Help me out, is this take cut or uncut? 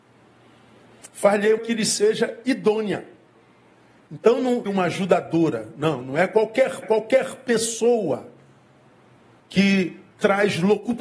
cut